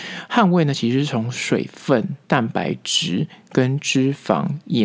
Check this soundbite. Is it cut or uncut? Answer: cut